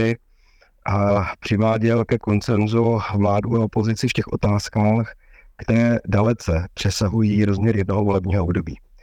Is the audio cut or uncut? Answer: uncut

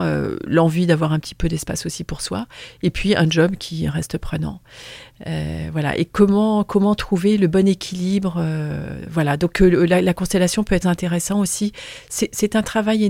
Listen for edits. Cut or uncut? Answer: cut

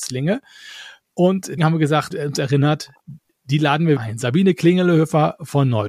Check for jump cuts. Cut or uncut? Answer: cut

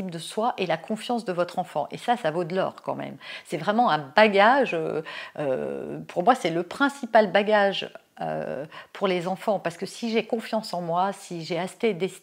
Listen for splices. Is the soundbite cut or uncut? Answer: uncut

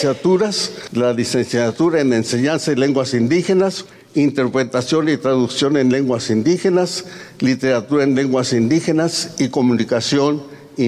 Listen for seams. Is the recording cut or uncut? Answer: uncut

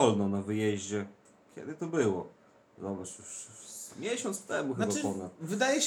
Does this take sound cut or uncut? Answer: uncut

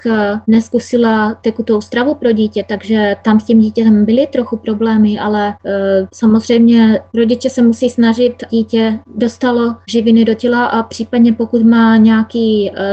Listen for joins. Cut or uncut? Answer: cut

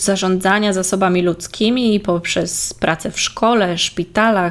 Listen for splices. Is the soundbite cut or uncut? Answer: uncut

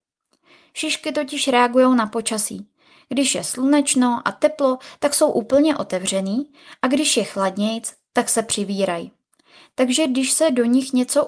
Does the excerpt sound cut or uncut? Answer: uncut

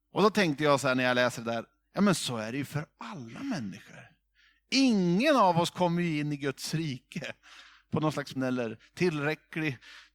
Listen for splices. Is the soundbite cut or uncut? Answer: cut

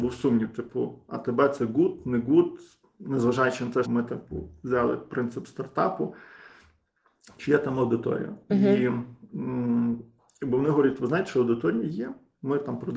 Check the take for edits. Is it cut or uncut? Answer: cut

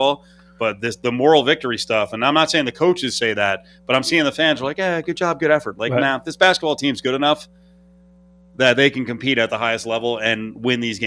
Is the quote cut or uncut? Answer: uncut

